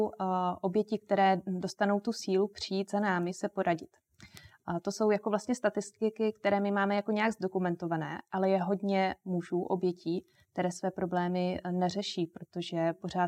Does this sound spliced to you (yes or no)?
no